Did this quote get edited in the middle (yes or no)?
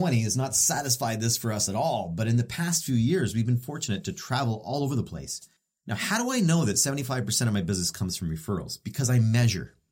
no